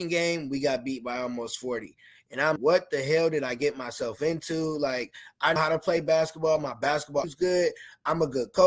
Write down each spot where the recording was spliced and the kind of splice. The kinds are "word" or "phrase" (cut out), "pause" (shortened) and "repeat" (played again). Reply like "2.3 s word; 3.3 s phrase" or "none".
2.6 s word; 5.6 s word; 7.2 s word